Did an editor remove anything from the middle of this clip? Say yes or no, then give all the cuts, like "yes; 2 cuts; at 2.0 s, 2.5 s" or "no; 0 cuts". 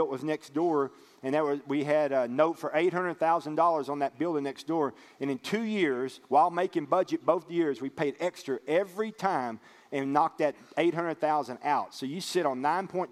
no; 0 cuts